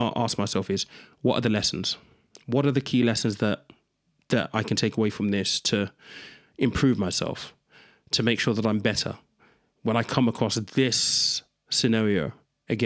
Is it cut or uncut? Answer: uncut